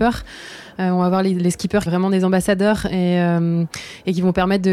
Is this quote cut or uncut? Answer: cut